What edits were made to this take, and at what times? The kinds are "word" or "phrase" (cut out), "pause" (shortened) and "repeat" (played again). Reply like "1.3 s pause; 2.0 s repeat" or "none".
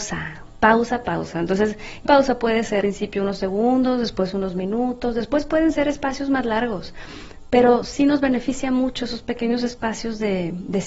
2.1 s word; 2.8 s word